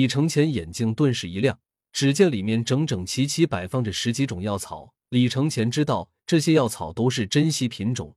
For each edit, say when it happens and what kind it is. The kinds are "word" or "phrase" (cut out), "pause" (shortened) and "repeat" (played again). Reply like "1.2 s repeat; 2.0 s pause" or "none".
1.8 s pause; 5.0 s pause